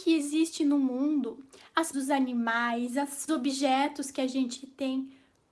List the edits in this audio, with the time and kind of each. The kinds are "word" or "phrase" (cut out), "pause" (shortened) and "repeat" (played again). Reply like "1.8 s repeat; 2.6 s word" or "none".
1.9 s word; 3.3 s phrase